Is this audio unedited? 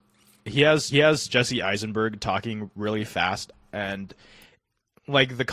no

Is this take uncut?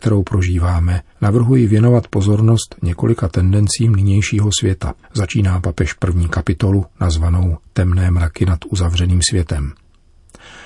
no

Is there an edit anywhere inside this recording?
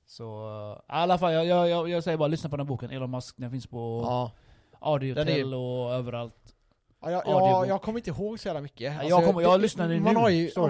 no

